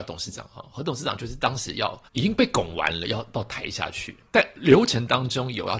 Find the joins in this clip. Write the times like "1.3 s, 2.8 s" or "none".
2.1 s, 4.3 s